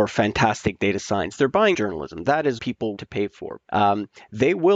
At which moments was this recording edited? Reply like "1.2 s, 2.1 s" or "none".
1.7 s, 2.6 s, 3.0 s, 3.7 s

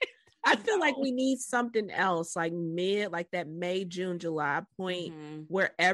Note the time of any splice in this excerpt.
none

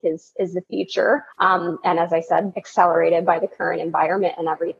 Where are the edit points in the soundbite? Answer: 1.3 s, 2.5 s

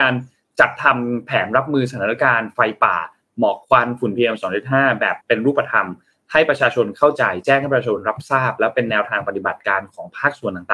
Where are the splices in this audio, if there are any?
5.2 s

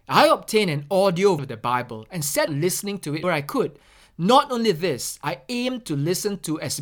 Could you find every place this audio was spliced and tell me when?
1.4 s, 2.5 s, 3.2 s

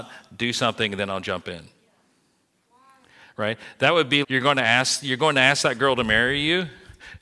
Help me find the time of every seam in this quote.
4.2 s

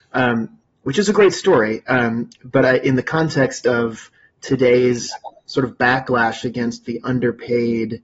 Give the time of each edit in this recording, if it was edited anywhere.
none

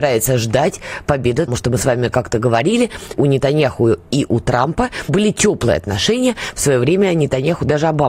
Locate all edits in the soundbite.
1.5 s, 3.1 s, 5.1 s

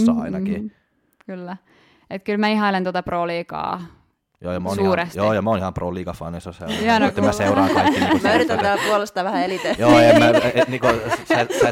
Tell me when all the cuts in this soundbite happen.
none

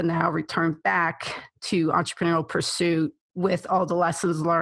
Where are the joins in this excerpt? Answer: 3.2 s

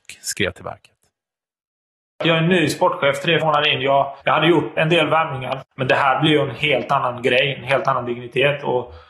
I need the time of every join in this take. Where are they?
3.4 s, 4.2 s, 4.8 s

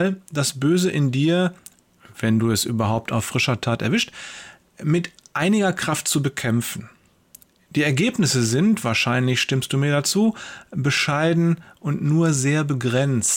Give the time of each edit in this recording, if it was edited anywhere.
none

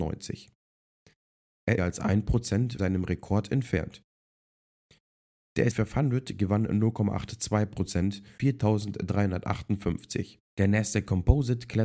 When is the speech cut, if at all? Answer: 1.8 s, 2.8 s, 5.7 s, 8.4 s, 10.5 s

